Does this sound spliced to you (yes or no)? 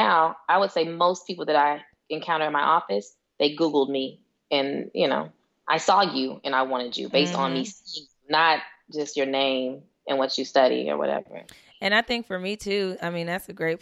no